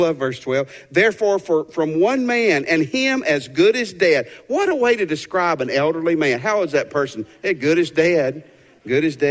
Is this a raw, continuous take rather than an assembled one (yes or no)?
yes